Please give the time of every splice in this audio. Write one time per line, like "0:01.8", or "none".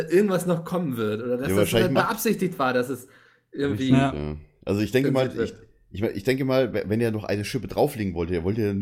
none